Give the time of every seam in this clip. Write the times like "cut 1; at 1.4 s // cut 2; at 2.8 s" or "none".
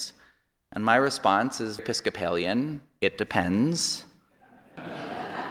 cut 1; at 1.8 s